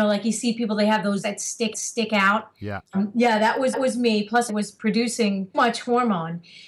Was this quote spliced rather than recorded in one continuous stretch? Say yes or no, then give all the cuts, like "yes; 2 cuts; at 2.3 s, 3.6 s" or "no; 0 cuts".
yes; 6 cuts; at 1.2 s, 1.7 s, 2.9 s, 3.7 s, 4.5 s, 5.5 s